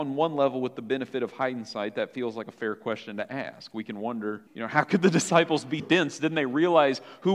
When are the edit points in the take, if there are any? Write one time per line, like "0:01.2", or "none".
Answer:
0:04.5
0:05.8